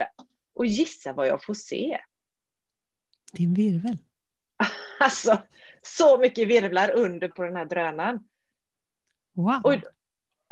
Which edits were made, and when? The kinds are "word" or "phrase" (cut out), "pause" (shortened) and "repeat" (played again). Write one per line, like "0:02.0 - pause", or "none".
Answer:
0:07.3 - word